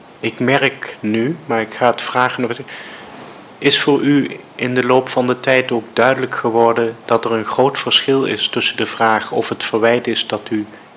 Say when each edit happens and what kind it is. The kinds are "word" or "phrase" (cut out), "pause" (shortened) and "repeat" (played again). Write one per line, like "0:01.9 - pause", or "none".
none